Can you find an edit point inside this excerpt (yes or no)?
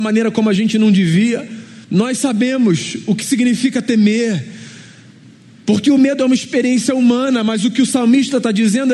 yes